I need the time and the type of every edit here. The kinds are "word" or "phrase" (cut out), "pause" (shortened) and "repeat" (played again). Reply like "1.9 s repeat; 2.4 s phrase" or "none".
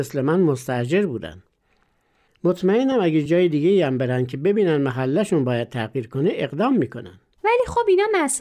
none